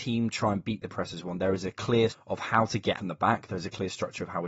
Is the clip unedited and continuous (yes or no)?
no